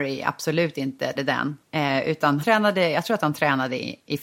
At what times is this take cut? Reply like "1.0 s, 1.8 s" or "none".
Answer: 1.1 s, 1.6 s, 2.4 s